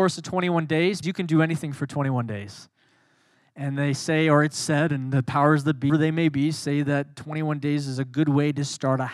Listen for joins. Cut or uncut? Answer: cut